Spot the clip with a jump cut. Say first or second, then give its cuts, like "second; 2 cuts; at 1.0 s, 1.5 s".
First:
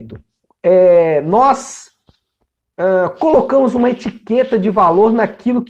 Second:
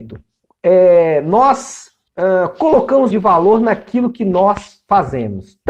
second; 2 cuts; at 2.1 s, 3.1 s